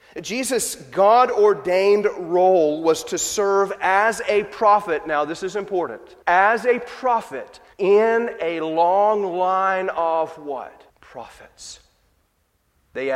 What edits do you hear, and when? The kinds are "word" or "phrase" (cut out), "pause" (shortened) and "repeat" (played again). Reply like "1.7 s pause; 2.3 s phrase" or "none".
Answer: 6.2 s pause; 7.7 s pause; 10.9 s pause